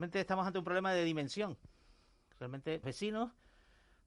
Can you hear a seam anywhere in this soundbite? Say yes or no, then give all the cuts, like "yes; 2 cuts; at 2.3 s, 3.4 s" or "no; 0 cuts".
yes; 1 cut; at 2.8 s